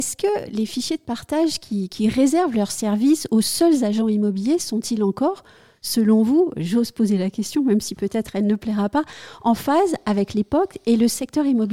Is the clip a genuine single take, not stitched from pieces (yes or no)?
yes